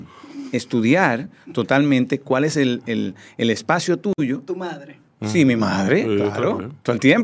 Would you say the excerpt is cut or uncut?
uncut